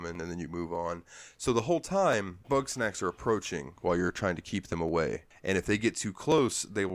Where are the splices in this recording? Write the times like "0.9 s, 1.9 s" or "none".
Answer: 2.4 s